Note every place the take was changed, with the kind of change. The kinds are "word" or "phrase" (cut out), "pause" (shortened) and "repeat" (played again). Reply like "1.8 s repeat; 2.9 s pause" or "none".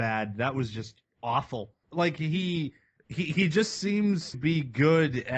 4.3 s word